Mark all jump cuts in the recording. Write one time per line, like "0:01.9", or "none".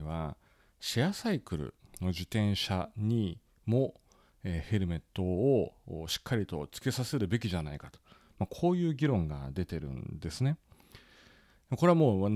none

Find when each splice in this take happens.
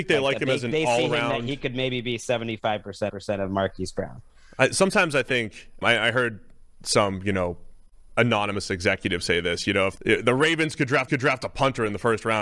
0:03.1
0:05.8
0:10.0
0:11.1

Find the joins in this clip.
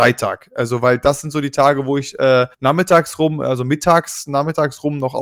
0:02.5

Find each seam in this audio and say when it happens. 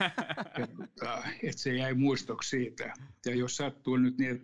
none

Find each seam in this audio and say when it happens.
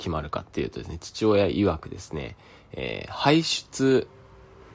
none

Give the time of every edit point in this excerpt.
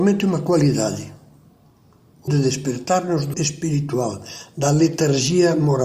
0:02.3
0:03.3

